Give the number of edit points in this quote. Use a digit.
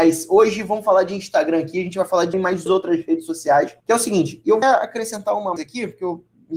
5